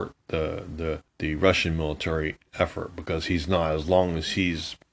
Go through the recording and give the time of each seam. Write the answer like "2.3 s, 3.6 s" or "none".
1.1 s